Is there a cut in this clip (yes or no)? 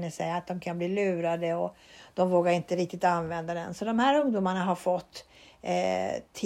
no